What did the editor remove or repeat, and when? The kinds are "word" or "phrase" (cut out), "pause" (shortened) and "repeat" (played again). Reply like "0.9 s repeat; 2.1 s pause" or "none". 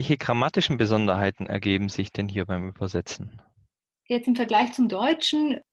none

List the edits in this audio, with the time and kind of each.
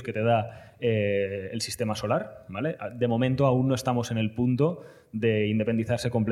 none

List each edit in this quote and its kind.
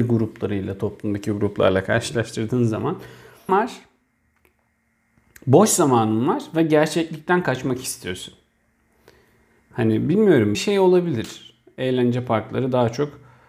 3.5 s word; 10.5 s word

